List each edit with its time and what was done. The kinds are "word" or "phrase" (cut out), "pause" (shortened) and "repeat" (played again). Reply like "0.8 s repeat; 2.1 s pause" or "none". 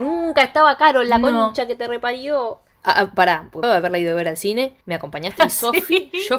3.6 s phrase; 4.8 s pause; 5.4 s word